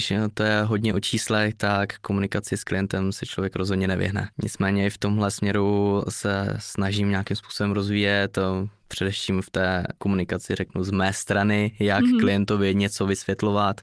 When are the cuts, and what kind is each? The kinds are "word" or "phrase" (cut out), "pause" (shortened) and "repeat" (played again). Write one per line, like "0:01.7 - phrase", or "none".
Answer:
0:04.3 - pause